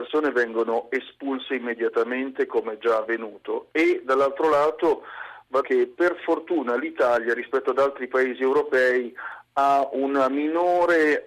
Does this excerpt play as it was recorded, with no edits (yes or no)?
no